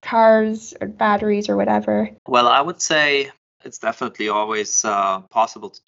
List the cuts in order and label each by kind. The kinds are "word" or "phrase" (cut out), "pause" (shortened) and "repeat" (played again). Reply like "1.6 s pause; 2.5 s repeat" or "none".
2.2 s pause; 3.4 s pause